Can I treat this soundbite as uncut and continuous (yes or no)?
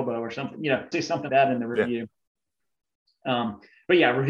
no